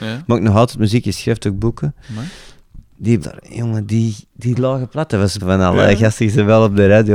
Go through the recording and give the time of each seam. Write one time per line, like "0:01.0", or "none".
0:02.0
0:03.2
0:04.3
0:05.4